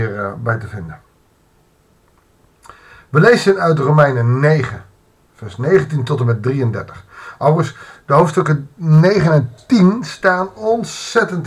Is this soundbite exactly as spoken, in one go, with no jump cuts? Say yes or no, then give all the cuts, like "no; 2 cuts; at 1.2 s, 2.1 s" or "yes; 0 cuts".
yes; 0 cuts